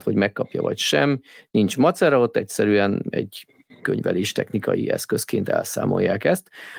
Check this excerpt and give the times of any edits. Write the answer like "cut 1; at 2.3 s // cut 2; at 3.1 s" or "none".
none